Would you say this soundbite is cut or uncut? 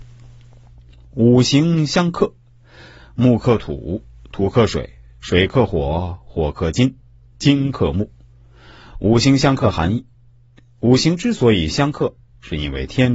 uncut